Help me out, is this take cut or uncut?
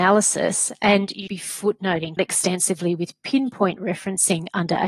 cut